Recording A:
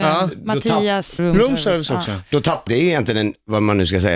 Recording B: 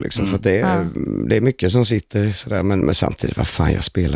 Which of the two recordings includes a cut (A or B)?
A